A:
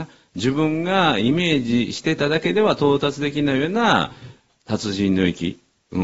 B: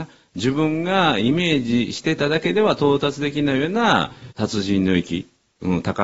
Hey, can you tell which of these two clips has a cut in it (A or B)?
B